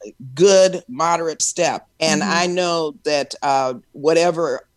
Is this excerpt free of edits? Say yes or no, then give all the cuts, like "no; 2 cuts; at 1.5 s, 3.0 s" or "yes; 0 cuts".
no; 2 cuts; at 1.4 s, 1.9 s